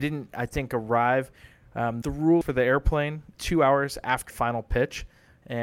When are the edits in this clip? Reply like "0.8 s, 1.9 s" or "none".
2.0 s, 2.4 s, 3.3 s, 4.3 s